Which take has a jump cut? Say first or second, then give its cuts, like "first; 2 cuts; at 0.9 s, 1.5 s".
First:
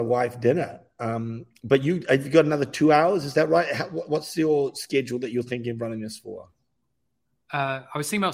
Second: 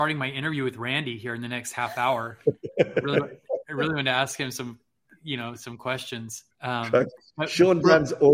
second; 1 cut; at 6.5 s